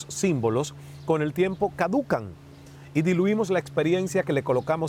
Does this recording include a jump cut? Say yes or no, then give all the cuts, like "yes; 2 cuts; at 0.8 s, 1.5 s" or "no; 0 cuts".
no; 0 cuts